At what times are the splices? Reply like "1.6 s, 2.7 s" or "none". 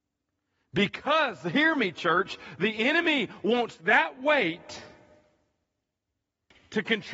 none